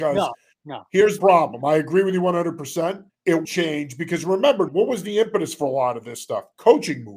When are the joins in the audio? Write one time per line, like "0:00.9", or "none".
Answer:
0:01.2
0:03.1
0:03.4
0:04.7

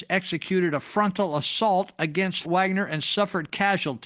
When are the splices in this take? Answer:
0:02.4

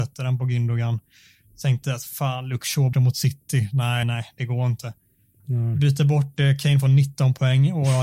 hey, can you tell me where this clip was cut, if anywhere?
0:02.9
0:04.0

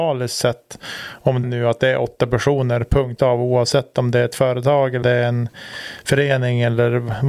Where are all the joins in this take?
0:01.4
0:03.2
0:05.0

